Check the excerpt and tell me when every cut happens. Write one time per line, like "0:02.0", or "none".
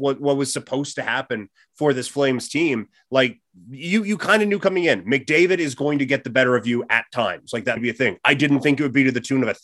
0:07.8